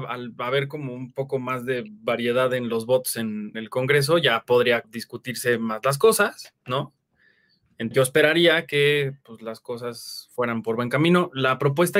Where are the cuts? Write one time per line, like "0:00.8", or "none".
0:03.5
0:04.8
0:07.9